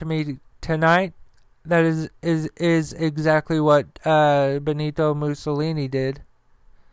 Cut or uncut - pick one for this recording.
uncut